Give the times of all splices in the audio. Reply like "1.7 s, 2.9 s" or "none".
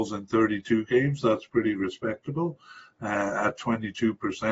none